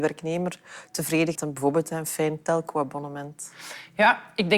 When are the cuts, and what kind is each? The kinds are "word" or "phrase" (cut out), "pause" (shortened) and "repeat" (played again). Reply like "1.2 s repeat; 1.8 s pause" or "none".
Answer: 1.3 s phrase